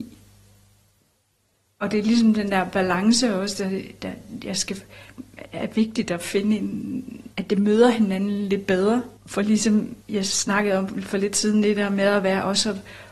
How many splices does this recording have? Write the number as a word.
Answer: three